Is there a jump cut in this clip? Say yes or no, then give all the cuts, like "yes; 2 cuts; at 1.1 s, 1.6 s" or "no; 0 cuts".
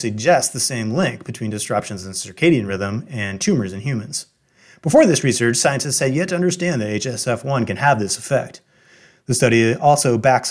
no; 0 cuts